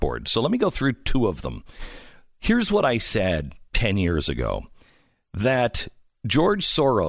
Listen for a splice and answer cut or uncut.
uncut